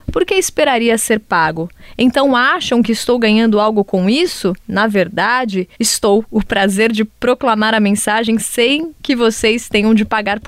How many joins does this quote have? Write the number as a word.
two